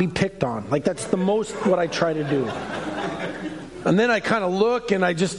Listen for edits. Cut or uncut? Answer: uncut